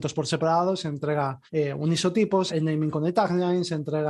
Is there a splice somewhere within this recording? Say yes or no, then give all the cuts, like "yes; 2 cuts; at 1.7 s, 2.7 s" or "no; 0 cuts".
yes; 2 cuts; at 1.5 s, 2.5 s